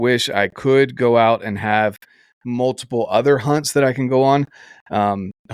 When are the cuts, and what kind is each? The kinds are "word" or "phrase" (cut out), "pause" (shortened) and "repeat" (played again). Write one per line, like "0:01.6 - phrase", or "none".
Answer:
none